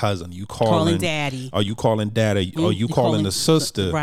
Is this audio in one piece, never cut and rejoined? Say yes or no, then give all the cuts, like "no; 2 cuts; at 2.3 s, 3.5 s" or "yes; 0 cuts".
yes; 0 cuts